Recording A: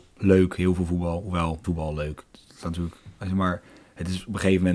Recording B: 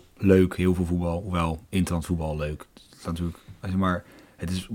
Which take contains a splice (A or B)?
A